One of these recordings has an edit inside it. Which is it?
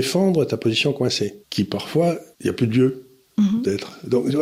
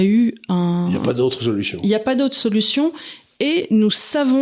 first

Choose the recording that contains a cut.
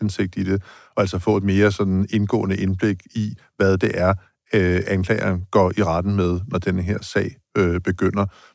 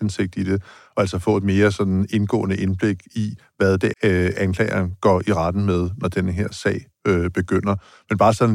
second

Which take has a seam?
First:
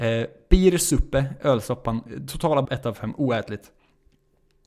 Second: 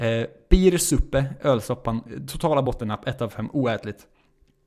first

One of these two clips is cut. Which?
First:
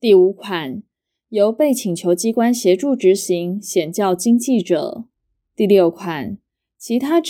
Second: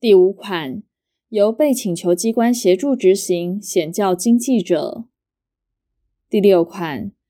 first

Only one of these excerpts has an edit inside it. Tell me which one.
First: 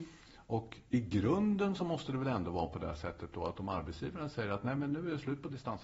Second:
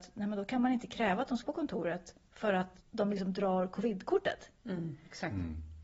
second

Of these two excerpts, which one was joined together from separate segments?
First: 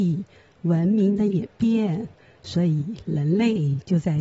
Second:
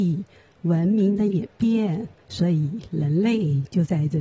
second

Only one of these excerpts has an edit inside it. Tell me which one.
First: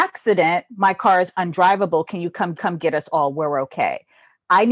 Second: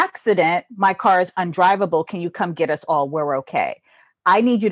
first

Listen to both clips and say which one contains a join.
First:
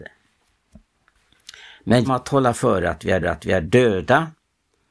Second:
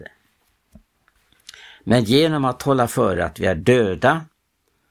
first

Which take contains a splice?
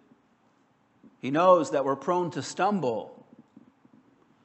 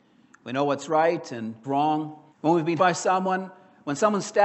second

